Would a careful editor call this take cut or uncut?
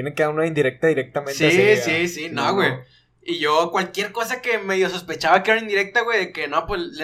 uncut